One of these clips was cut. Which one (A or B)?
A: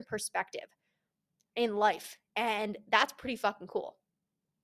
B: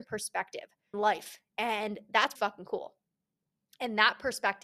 B